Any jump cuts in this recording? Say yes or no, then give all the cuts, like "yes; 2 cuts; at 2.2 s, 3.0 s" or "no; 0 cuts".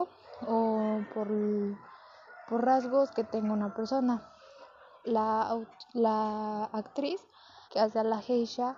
yes; 1 cut; at 7.6 s